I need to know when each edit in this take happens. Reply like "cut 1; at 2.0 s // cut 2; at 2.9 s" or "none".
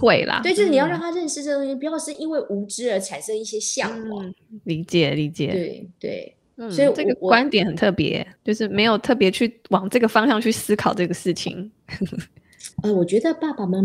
cut 1; at 8.4 s // cut 2; at 12.7 s